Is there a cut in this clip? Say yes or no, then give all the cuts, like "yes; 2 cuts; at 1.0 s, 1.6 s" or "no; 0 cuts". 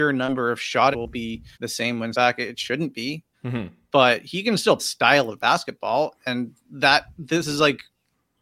yes; 5 cuts; at 0.9 s, 1.5 s, 2.1 s, 3.3 s, 4.8 s